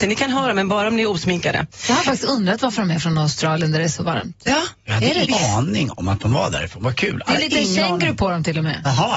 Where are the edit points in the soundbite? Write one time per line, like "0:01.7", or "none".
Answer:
0:05.3